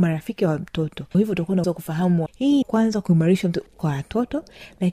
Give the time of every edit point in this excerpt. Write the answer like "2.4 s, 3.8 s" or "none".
1.1 s, 1.6 s, 2.3 s, 2.6 s, 3.7 s

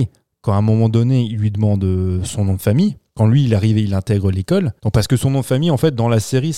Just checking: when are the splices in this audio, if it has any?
3.1 s, 4.8 s

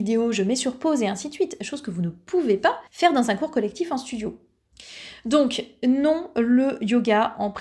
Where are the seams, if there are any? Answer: 2.9 s

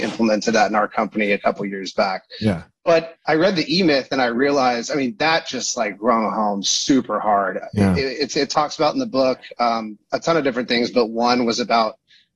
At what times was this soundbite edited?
none

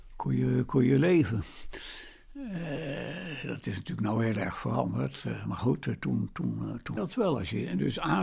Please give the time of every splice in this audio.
7.0 s

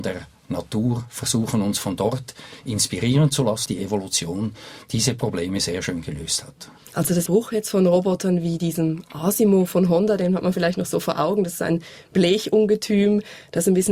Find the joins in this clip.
3.7 s, 7.3 s

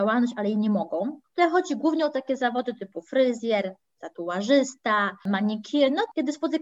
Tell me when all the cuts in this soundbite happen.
none

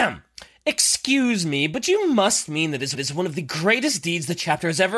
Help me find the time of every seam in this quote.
2.9 s

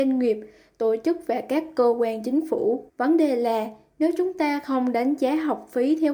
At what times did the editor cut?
2.9 s

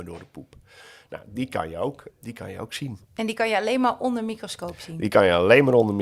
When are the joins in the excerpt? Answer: 2.1 s, 3.0 s

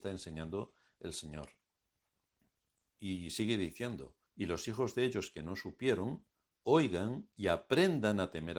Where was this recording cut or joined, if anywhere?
4.3 s

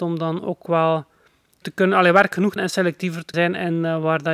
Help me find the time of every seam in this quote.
1.6 s, 2.6 s, 3.3 s

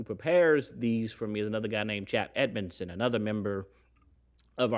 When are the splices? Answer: none

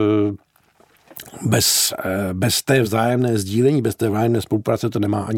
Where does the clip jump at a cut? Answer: none

